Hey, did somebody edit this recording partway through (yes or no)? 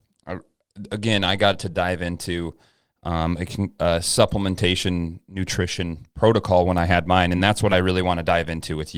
no